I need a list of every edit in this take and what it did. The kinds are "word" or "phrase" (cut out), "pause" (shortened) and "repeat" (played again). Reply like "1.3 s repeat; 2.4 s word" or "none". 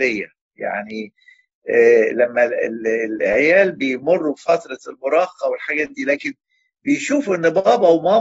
none